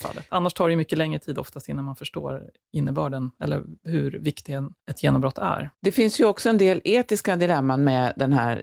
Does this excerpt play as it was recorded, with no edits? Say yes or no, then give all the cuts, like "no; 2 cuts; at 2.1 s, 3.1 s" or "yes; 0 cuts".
no; 2 cuts; at 4.8 s, 5.7 s